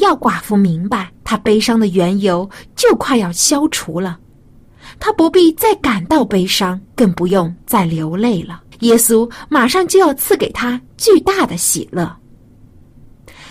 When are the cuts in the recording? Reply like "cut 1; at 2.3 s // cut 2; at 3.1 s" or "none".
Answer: cut 1; at 1.2 s // cut 2; at 6.8 s // cut 3; at 8.7 s